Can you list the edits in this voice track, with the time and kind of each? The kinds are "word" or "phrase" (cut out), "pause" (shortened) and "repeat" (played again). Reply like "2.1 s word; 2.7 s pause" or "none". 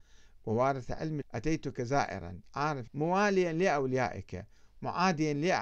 1.2 s word; 2.9 s word